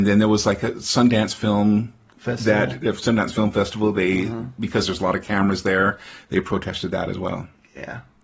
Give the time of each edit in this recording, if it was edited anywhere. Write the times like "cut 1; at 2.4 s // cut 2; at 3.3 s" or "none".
none

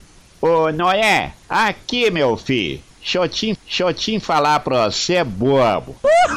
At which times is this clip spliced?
cut 1; at 1.4 s // cut 2; at 3.5 s

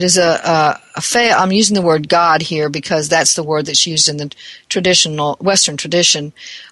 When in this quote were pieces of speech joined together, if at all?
none

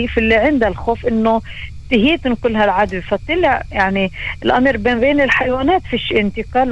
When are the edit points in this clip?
none

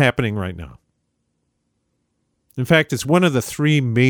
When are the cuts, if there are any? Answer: none

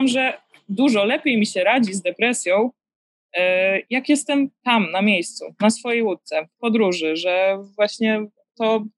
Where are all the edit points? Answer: none

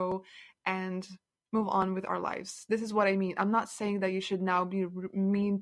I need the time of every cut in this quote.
none

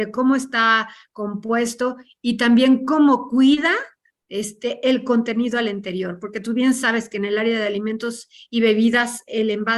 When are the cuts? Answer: none

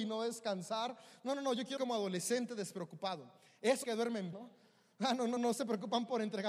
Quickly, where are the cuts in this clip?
cut 1; at 1.8 s // cut 2; at 3.8 s // cut 3; at 4.3 s // cut 4; at 5.4 s

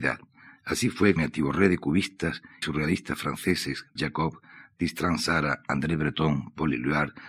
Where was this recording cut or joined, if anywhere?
cut 1; at 1.2 s // cut 2; at 2.6 s // cut 3; at 4.0 s

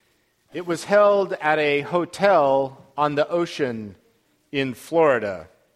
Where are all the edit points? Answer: none

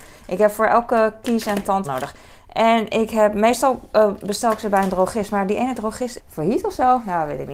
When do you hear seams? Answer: cut 1; at 1.8 s // cut 2; at 6.2 s

